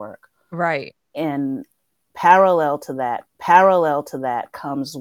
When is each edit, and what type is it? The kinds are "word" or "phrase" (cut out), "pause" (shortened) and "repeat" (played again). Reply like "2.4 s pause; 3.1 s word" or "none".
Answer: 3.3 s repeat